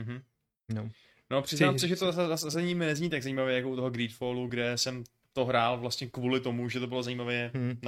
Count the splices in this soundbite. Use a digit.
0